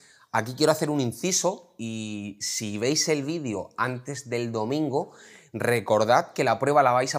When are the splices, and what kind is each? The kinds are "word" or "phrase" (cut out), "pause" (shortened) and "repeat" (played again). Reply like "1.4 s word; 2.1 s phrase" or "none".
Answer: none

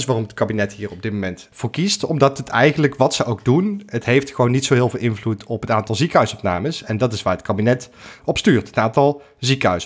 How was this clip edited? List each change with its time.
1.5 s word; 8.2 s word

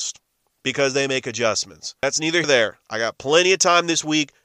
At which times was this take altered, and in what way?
2.0 s pause; 2.4 s word

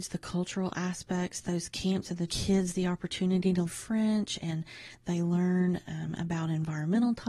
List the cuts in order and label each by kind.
2.3 s phrase; 3.7 s word

